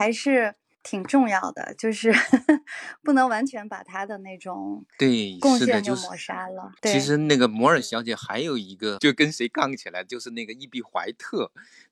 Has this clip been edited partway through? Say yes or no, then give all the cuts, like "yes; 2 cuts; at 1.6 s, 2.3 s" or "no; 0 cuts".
yes; 1 cut; at 6.8 s